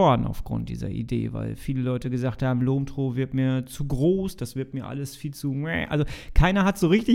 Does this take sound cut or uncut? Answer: uncut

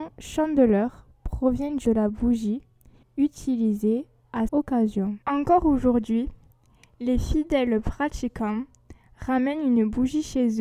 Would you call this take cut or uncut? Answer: cut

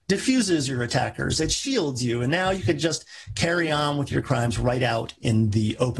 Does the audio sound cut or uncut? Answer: uncut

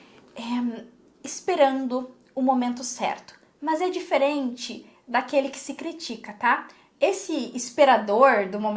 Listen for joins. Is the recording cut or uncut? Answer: uncut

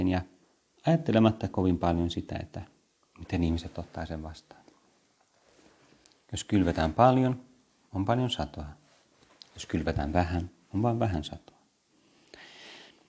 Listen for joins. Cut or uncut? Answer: uncut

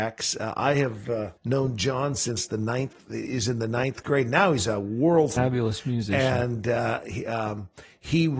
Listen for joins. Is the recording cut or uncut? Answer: cut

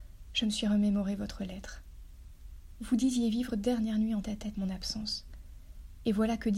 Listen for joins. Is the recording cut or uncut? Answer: cut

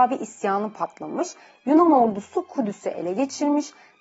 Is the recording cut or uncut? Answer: uncut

